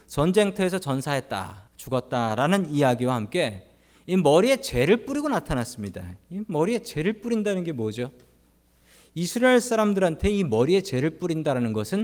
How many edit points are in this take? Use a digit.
1